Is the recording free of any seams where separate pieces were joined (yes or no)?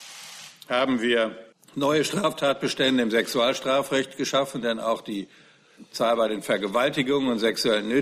no